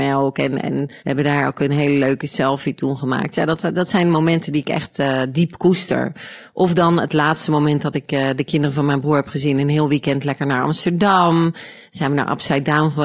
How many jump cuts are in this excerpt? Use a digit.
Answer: 1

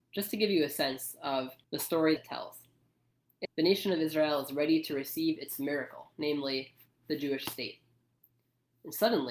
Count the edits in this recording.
3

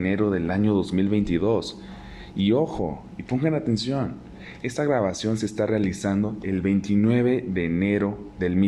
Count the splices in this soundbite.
0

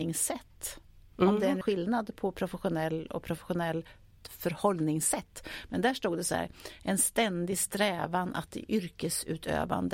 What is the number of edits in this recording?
1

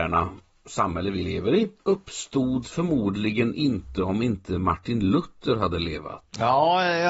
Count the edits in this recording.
1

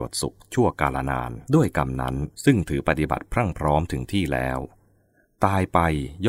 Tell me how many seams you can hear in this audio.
2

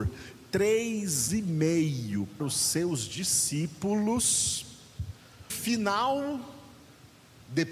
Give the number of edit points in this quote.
3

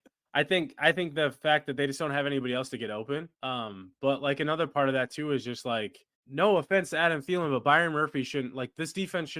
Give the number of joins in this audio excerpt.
2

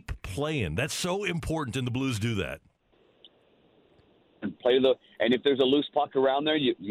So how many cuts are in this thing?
0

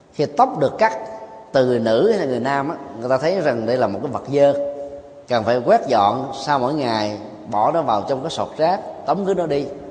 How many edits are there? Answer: 1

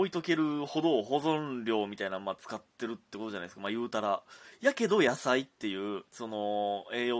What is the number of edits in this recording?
1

